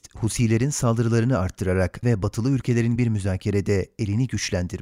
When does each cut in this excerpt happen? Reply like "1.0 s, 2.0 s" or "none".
2.0 s, 3.0 s